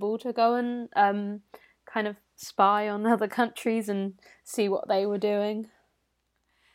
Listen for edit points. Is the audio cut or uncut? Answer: uncut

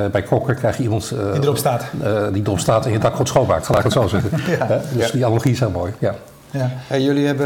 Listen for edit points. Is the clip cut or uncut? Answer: uncut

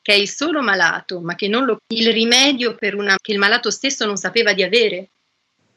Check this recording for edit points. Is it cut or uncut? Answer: cut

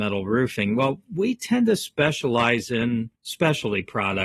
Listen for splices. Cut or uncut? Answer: cut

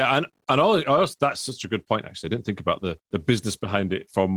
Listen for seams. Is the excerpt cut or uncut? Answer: cut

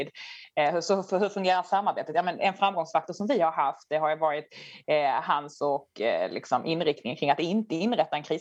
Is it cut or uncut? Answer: uncut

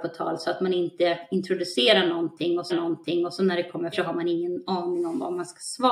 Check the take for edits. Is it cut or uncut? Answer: cut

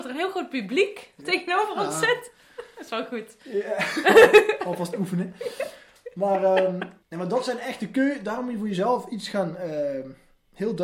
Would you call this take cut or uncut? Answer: cut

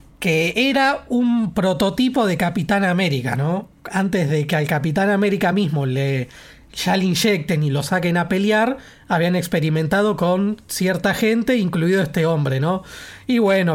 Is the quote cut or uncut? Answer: uncut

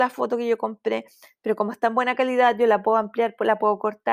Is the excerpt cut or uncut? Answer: uncut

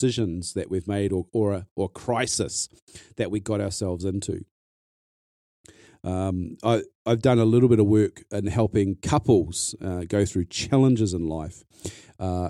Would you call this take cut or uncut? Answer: uncut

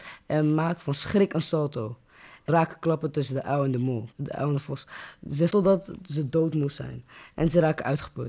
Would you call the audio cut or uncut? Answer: cut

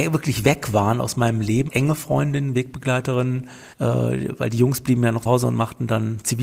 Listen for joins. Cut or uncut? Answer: cut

